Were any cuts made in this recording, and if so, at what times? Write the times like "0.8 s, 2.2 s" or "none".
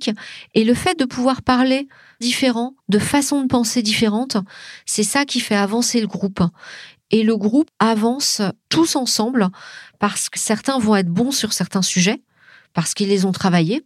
2.2 s, 2.8 s, 7.7 s, 10.4 s